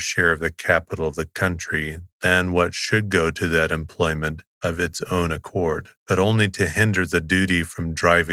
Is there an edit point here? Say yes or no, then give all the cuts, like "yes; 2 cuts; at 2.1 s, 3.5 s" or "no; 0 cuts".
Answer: yes; 1 cut; at 6.0 s